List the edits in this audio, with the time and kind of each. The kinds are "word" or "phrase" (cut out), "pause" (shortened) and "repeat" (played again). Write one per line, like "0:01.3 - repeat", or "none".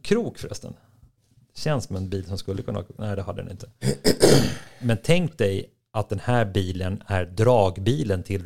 none

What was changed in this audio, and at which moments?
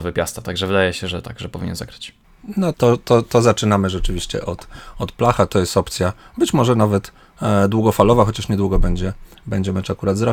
0:02.7 - word

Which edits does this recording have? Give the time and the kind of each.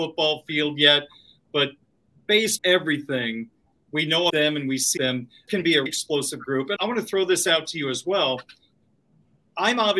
0:02.6 - word
0:04.3 - word
0:05.0 - word
0:05.5 - word
0:05.9 - word
0:06.8 - word

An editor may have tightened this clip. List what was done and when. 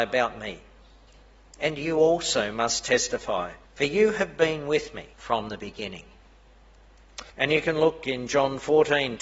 0:03.6 - pause
0:05.1 - pause
0:07.3 - pause

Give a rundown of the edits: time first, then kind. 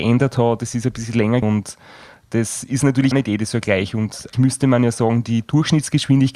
0:01.4 - word
0:03.1 - word
0:04.3 - word

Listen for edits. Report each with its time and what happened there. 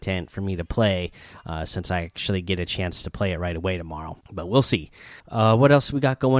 0:04.2 - pause
0:05.2 - pause

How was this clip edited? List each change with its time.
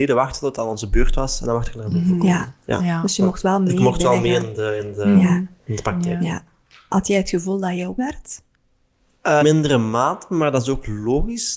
0:08.0 - word
0:09.4 - word

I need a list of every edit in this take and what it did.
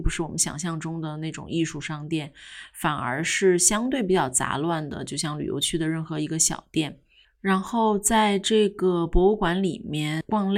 none

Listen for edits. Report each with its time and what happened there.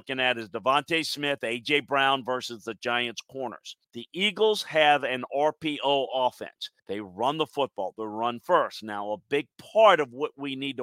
0:03.8 - pause
0:06.8 - pause

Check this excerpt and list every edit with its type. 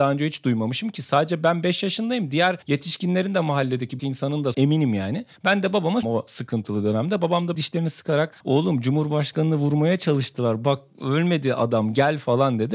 0:02.6 - pause
0:04.0 - word
0:04.5 - phrase
0:05.4 - pause
0:06.0 - phrase
0:07.5 - word
0:08.4 - pause

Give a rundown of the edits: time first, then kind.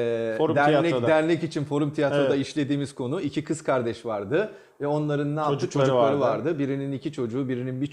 none

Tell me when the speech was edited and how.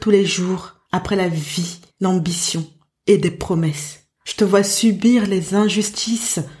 0:01.9 - pause
0:04.1 - pause

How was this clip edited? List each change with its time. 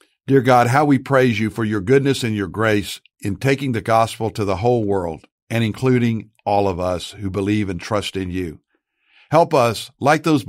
none

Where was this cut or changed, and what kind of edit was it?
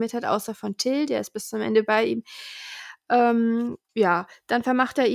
0:03.8 - pause

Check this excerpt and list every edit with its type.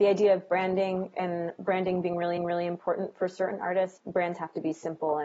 0:02.4 - repeat
0:04.0 - word

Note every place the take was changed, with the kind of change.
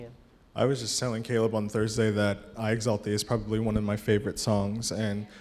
none

